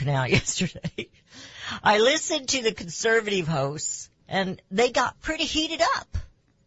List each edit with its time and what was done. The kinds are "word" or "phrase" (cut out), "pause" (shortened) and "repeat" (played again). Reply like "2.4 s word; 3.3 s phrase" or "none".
4.2 s pause